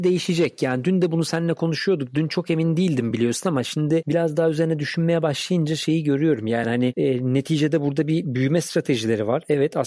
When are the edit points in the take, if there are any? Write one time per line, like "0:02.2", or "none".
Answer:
none